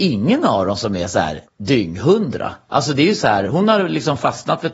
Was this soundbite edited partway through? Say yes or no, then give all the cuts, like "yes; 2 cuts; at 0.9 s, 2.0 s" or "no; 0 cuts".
yes; 1 cut; at 1.5 s